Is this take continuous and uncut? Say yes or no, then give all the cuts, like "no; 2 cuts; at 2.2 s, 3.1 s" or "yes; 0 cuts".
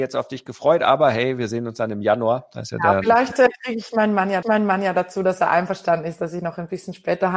no; 1 cut; at 4.4 s